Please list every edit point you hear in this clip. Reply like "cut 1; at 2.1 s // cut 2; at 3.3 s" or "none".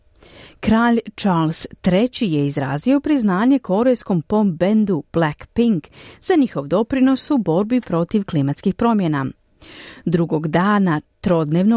none